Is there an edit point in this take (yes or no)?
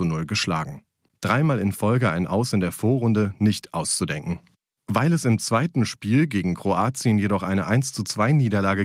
no